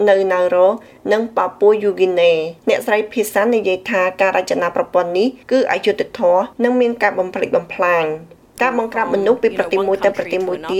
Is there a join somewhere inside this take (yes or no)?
yes